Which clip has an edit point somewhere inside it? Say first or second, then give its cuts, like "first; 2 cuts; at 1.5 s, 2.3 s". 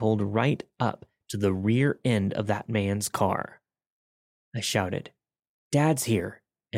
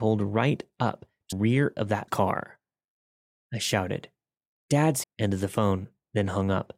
second; 4 cuts; at 1.3 s, 1.8 s, 2.1 s, 5.0 s